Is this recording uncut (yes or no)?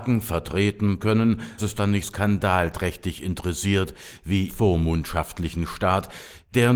no